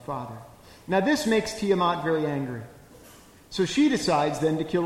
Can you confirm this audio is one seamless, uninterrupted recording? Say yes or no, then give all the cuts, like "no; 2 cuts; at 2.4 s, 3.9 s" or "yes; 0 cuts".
yes; 0 cuts